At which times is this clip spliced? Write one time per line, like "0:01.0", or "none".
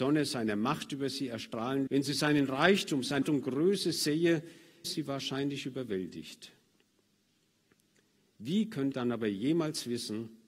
0:01.9
0:03.2
0:04.8
0:08.9